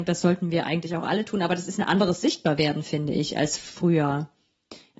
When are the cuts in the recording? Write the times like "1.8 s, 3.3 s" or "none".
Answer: none